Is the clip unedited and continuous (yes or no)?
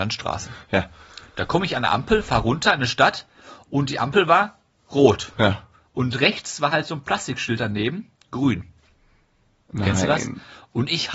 yes